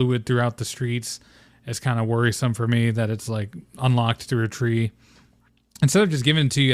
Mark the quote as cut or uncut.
uncut